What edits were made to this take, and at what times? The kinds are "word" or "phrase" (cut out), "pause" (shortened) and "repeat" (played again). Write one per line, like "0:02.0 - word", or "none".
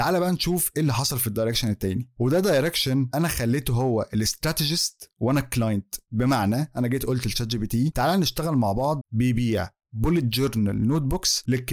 0:09.0 - phrase